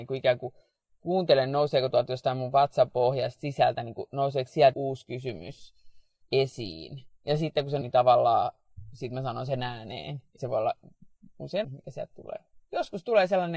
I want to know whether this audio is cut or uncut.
cut